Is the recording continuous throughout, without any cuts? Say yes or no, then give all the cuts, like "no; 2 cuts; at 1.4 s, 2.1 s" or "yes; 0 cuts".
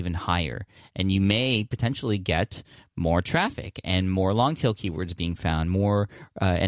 yes; 0 cuts